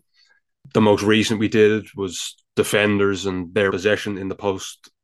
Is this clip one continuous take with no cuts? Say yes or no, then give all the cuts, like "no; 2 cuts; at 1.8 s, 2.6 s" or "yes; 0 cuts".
no; 1 cut; at 3.7 s